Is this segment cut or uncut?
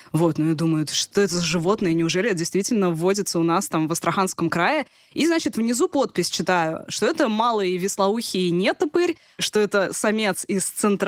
uncut